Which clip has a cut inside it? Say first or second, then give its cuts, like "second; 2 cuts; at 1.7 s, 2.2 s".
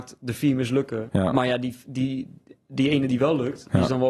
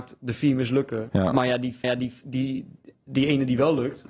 second; 1 cut; at 1.8 s